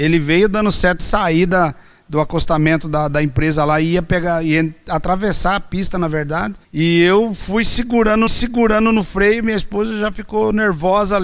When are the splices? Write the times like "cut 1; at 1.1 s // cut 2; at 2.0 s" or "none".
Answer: cut 1; at 1.0 s // cut 2; at 6.6 s // cut 3; at 8.3 s